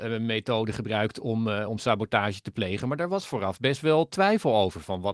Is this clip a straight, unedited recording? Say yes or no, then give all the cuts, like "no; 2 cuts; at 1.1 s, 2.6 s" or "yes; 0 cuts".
yes; 0 cuts